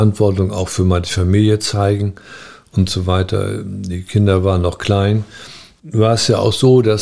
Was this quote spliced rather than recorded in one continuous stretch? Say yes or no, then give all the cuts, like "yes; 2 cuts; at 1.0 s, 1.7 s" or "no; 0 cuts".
no; 0 cuts